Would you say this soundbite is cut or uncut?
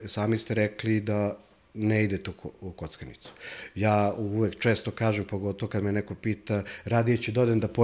uncut